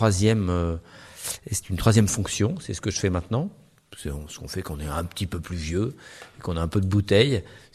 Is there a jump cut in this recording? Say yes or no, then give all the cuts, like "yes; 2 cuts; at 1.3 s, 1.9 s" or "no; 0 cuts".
no; 0 cuts